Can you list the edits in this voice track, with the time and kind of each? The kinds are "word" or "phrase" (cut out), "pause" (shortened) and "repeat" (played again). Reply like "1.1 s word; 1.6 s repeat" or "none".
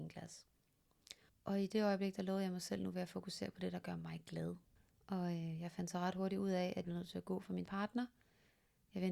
1.3 s pause; 4.8 s pause; 6.8 s word; 7.6 s word